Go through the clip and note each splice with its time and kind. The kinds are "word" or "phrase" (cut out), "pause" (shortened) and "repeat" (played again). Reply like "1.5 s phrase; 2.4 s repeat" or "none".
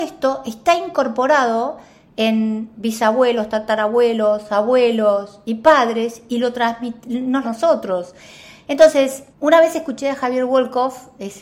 7.4 s phrase; 9.3 s pause